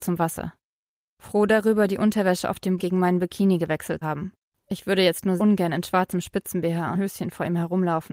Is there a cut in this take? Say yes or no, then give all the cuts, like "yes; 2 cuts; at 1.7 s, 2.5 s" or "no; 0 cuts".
yes; 5 cuts; at 2.8 s, 4.0 s, 4.4 s, 5.4 s, 6.9 s